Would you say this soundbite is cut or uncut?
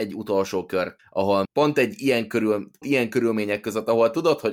cut